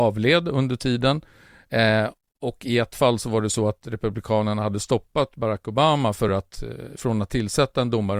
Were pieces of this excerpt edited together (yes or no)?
no